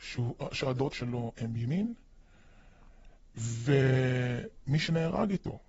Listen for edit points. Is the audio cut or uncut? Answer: cut